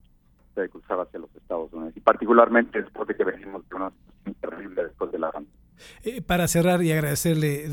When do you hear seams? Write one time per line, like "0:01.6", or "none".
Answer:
none